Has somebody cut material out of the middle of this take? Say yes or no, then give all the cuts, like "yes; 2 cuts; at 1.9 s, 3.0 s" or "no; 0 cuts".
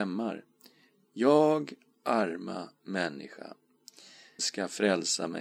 yes; 1 cut; at 4.4 s